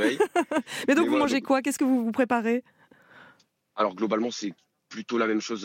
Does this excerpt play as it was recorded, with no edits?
yes; 0 cuts

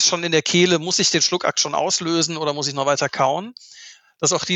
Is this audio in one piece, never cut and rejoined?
yes; 0 cuts

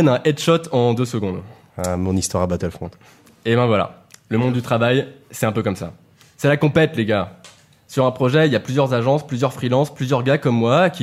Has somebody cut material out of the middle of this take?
no; 0 cuts

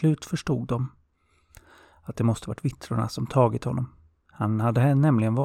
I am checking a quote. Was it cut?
no; 0 cuts

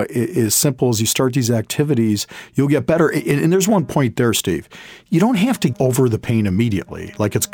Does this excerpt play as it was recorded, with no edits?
no; 1 cut; at 5.7 s

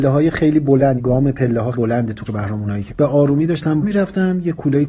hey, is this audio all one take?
no; 5 cuts; at 1.0 s, 1.7 s, 2.3 s, 2.9 s, 3.8 s

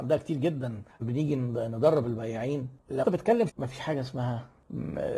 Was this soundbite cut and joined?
yes; 3 cuts; at 1.0 s, 3.0 s, 3.5 s

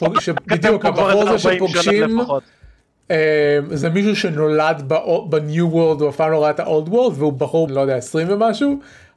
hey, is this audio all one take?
no; 1 cut; at 7.7 s

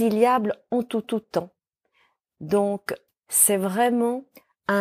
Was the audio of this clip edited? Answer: yes; 2 cuts; at 1.0 s, 3.1 s

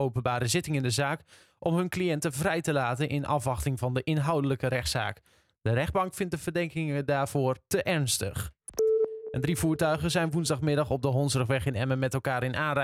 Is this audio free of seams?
yes; 0 cuts

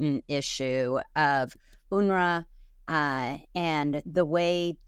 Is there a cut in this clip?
no; 0 cuts

